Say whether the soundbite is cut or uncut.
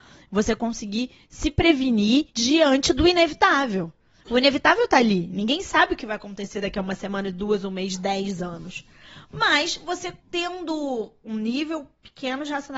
cut